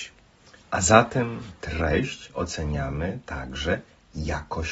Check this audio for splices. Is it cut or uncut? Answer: uncut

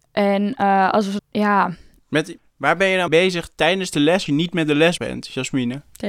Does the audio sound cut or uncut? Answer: cut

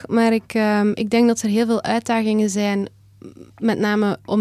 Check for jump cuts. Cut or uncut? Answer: uncut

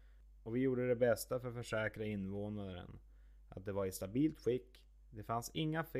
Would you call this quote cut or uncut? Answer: uncut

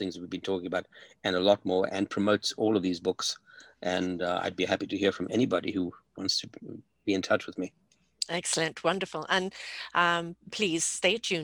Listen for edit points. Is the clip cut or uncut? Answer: uncut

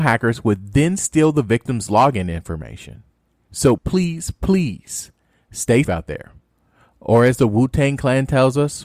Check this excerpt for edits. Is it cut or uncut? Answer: cut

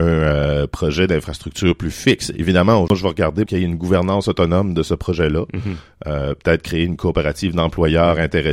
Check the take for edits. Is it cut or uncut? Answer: cut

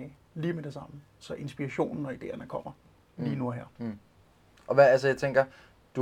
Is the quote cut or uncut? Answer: uncut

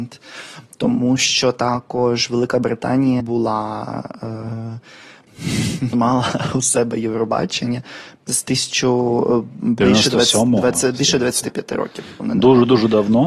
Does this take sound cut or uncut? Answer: cut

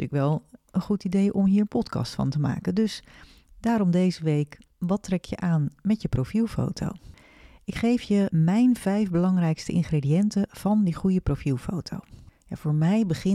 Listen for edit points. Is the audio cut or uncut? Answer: uncut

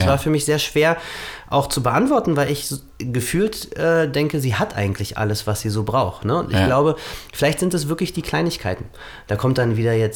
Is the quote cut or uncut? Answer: uncut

